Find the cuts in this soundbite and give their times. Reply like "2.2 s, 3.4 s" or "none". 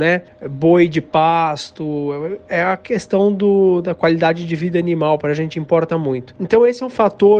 none